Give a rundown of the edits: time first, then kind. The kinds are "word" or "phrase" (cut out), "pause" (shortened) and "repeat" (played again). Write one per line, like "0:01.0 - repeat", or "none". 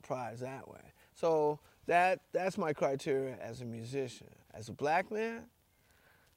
0:04.4 - pause